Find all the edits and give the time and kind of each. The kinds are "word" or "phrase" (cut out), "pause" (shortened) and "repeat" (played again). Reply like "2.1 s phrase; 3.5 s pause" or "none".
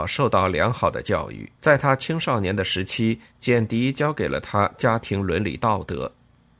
1.6 s pause

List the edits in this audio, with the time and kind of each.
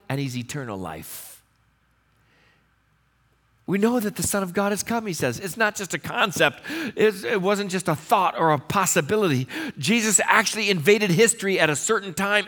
none

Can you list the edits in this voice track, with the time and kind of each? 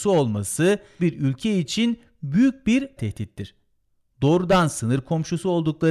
1.0 s word; 3.0 s word

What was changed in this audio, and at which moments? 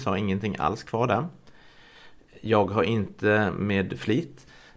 none

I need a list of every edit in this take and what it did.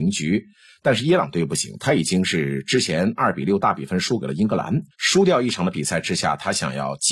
4.9 s pause

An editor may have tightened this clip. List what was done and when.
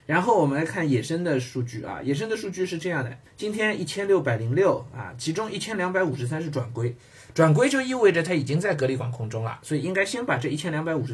3.3 s pause

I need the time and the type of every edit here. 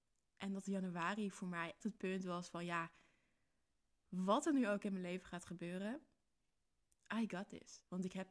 1.8 s word

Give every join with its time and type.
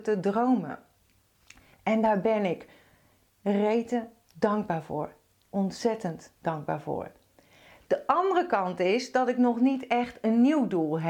none

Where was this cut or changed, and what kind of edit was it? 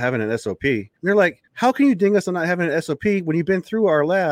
1.0 s pause; 1.5 s pause

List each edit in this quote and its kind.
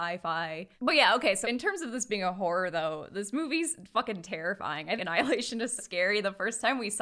1.4 s word; 5.0 s word; 5.8 s word

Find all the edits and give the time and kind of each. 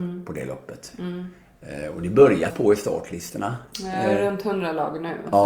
2.5 s word

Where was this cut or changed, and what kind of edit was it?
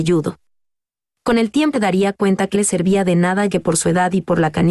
1.7 s word; 2.5 s word; 3.5 s word

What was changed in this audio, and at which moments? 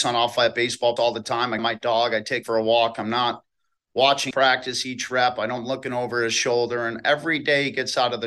1.0 s word; 1.6 s word; 2.4 s word; 4.3 s word; 5.6 s word

